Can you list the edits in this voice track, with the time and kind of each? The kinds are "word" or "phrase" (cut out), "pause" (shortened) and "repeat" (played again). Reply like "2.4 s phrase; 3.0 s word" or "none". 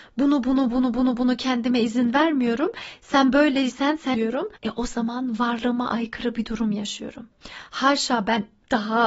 0.9 s repeat; 4.1 s word; 4.6 s pause